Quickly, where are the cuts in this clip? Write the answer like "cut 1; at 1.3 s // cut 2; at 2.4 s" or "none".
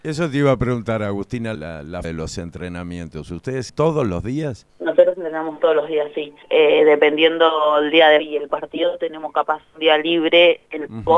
cut 1; at 1.6 s // cut 2; at 2.0 s // cut 3; at 3.7 s // cut 4; at 4.7 s // cut 5; at 6.4 s // cut 6; at 8.2 s // cut 7; at 8.5 s